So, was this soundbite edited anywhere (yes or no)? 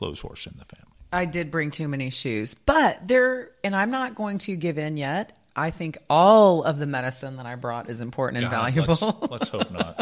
no